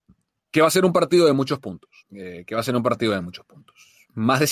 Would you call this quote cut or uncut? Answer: cut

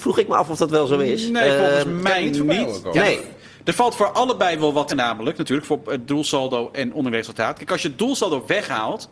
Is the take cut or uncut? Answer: cut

